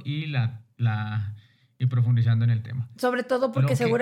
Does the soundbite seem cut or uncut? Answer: uncut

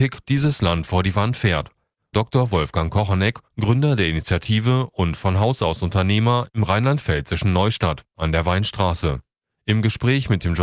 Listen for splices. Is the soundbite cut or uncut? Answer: cut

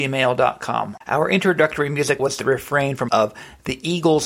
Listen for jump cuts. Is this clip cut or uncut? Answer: cut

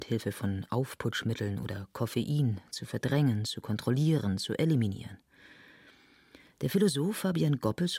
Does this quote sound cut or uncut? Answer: uncut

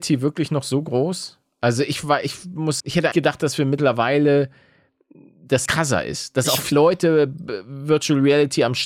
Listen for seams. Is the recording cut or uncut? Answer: cut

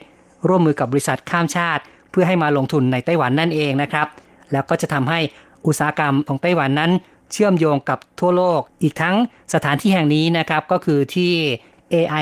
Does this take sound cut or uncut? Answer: cut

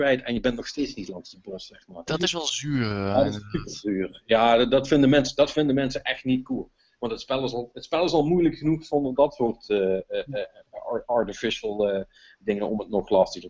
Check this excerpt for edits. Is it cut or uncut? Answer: uncut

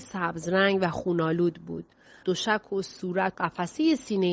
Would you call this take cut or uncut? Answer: cut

